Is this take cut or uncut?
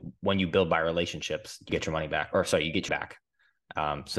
cut